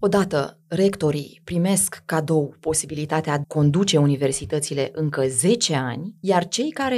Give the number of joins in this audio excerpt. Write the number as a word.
one